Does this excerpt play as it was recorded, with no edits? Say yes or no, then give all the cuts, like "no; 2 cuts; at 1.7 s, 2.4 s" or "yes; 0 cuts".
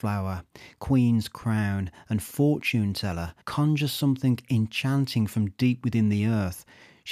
no; 1 cut; at 3.4 s